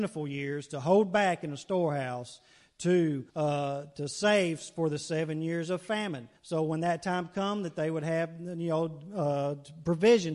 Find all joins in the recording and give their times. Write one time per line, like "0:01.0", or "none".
0:03.3
0:06.4